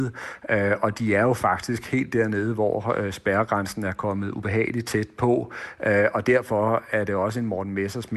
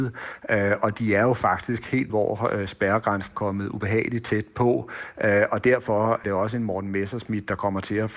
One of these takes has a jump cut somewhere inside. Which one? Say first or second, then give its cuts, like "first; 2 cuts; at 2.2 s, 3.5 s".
second; 3 cuts; at 2.1 s, 3.3 s, 6.2 s